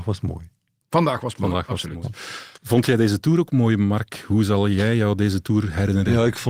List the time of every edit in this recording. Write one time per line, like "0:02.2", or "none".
0:02.6